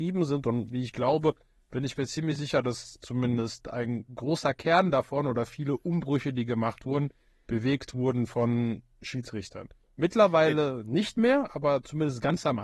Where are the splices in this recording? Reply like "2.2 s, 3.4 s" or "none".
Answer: none